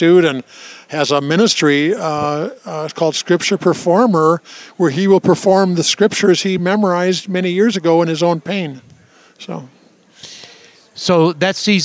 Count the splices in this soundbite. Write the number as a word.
zero